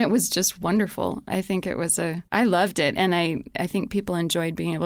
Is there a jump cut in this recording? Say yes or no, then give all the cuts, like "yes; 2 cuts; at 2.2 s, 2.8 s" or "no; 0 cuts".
yes; 1 cut; at 2.3 s